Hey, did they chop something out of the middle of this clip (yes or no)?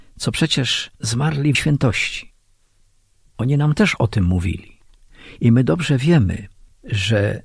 yes